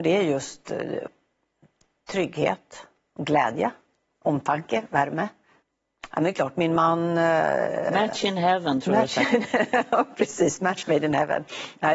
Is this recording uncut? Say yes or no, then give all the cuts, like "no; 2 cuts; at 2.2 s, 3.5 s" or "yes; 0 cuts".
no; 1 cut; at 5.6 s